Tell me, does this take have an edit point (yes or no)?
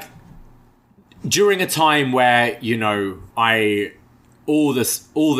yes